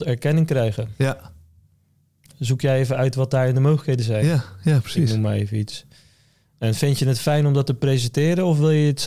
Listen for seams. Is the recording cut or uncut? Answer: uncut